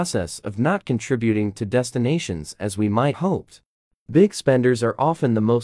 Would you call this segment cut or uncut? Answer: cut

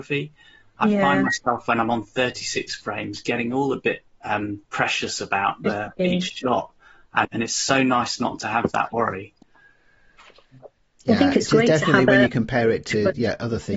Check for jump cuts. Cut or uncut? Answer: cut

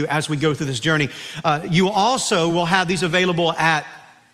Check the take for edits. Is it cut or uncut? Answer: uncut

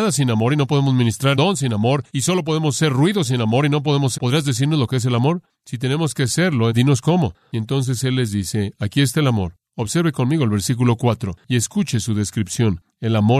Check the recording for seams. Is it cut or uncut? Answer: cut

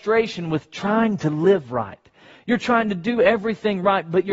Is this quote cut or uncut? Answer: uncut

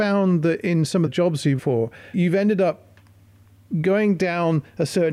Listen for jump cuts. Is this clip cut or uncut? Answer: cut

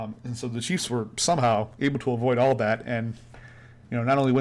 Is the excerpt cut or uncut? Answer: uncut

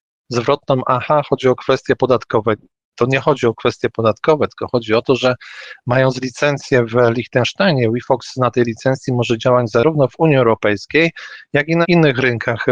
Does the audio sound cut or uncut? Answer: uncut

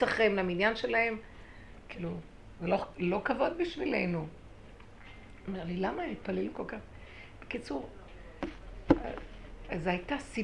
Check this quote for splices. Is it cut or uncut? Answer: uncut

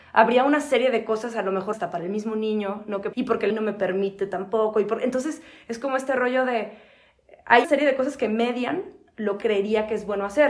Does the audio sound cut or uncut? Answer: cut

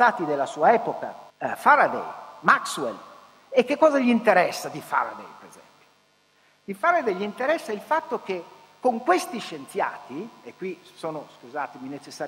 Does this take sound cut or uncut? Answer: cut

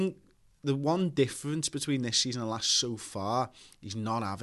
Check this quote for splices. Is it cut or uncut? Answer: uncut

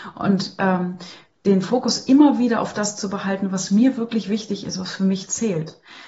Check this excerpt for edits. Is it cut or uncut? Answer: uncut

